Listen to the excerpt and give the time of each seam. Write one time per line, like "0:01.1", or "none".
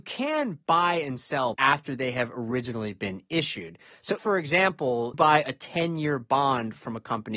0:01.5
0:04.2
0:05.1